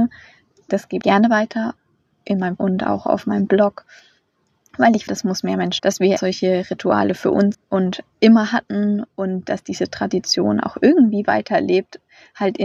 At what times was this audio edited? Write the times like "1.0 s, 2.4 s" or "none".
1.0 s, 2.6 s, 5.1 s, 5.8 s, 6.2 s, 7.5 s

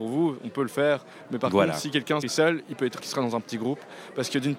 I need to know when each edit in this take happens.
2.2 s, 3.0 s

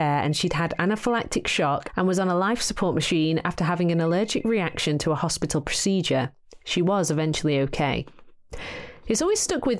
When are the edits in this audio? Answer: none

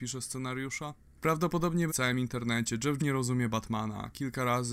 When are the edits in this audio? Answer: 1.9 s, 3.0 s

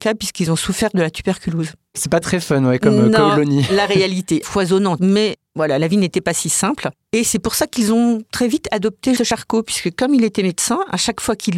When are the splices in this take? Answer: 2.2 s, 4.4 s, 5.0 s, 9.2 s

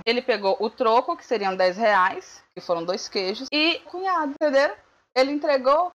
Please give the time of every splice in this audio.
3.8 s

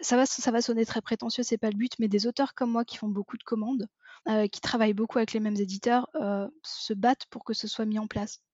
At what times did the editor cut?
4.2 s

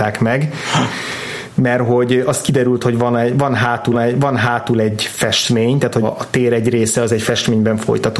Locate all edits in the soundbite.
3.9 s, 6.0 s

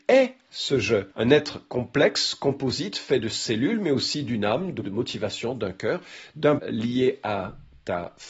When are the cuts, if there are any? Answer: 1.1 s, 4.8 s, 6.6 s

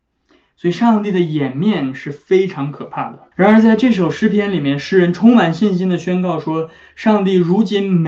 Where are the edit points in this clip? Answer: 3.3 s

